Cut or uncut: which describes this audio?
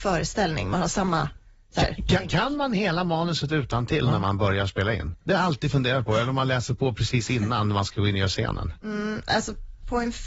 uncut